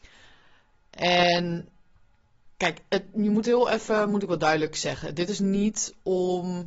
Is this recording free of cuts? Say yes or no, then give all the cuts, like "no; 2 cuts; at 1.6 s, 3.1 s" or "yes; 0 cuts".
yes; 0 cuts